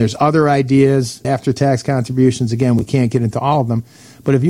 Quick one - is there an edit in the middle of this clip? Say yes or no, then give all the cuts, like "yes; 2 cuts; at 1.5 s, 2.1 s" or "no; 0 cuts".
yes; 1 cut; at 1.2 s